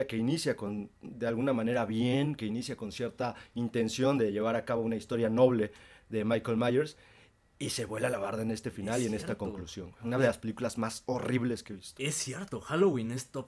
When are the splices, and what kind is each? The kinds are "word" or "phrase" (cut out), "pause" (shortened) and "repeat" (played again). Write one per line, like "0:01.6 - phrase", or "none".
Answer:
0:00.9 - pause

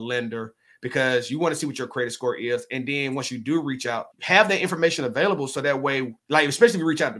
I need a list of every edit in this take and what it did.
0:04.1 - pause
0:06.2 - pause

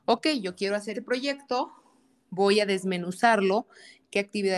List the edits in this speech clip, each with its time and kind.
0:00.9 - word

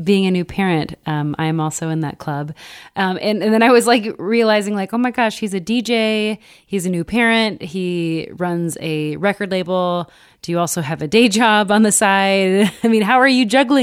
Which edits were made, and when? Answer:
none

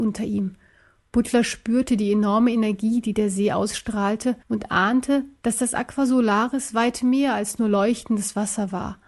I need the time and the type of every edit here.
0:04.4 - pause

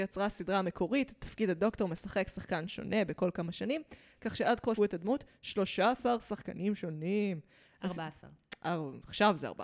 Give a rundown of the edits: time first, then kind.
0:04.8 - word

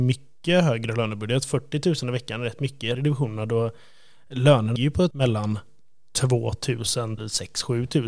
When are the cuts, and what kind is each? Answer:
0:02.9 - phrase
0:04.8 - word
0:05.1 - word
0:07.2 - word

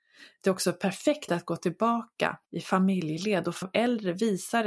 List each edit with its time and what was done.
0:01.3 - word
0:02.4 - pause
0:03.6 - word

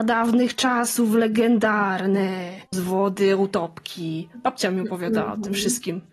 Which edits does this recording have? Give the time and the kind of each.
0:02.7 - word

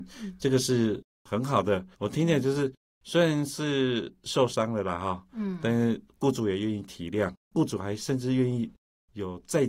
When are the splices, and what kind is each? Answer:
0:01.9 - pause
0:07.4 - pause

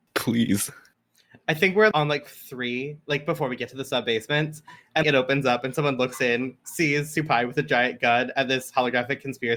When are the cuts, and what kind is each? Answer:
0:01.9 - word
0:02.3 - word
0:05.0 - word

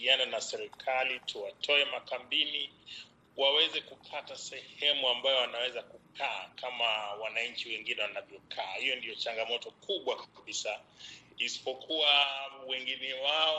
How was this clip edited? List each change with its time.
none

